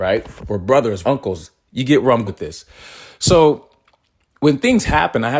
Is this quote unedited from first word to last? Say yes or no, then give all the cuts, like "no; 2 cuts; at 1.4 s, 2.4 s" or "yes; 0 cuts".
no; 2 cuts; at 1.0 s, 2.3 s